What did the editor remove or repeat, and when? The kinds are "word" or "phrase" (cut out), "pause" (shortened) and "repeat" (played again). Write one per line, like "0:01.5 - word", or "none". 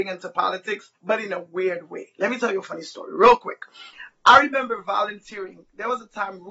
0:01.0 - pause

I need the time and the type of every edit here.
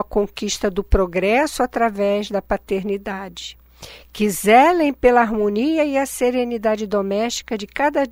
none

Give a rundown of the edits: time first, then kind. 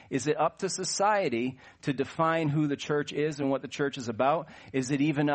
none

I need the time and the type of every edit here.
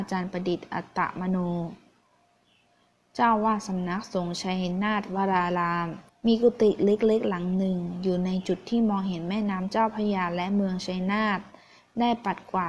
0:06.1 - pause

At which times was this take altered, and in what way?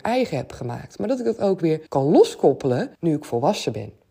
0:01.9 - pause
0:03.0 - pause

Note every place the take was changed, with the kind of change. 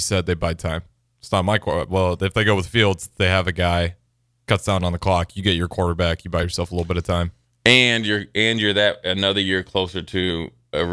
none

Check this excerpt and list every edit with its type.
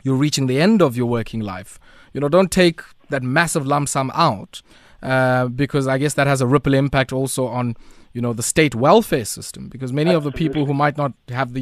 none

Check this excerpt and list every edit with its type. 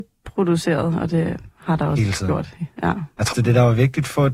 0:03.3 - word

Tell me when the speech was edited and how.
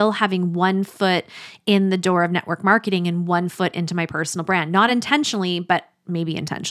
none

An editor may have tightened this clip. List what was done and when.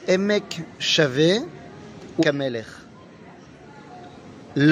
0:02.2 - word

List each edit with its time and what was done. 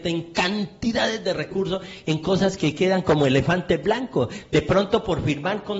none

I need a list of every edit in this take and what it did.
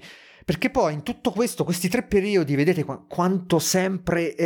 none

